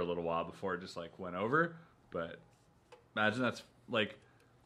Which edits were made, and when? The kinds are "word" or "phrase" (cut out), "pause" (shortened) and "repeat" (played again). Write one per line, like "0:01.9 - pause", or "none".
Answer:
none